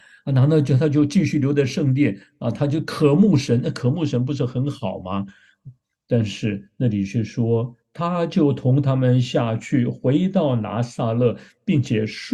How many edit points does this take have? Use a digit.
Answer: 1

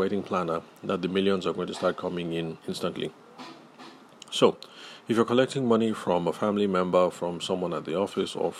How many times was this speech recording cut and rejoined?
1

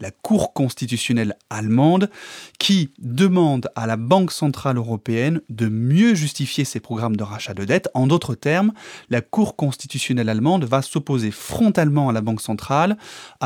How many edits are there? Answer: 0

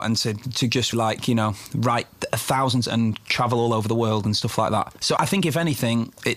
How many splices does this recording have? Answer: 3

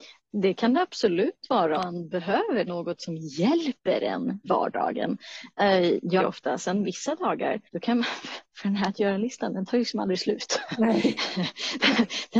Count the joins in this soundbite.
5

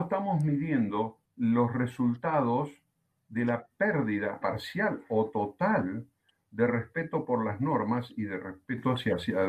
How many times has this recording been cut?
0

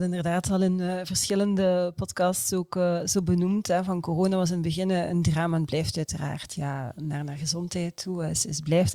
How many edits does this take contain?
0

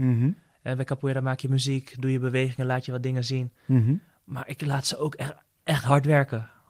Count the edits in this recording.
0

